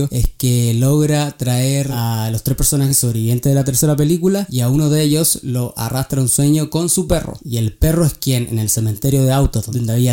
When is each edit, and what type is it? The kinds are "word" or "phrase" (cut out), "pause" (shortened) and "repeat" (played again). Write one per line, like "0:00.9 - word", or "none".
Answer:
none